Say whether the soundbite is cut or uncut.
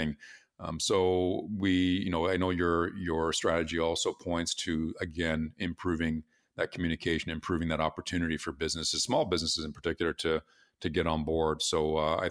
uncut